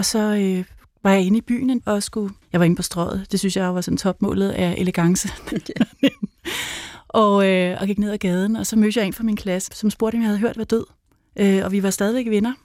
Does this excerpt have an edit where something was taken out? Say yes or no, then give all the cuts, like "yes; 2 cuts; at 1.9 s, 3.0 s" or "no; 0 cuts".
yes; 4 cuts; at 1.8 s, 2.4 s, 9.7 s, 10.6 s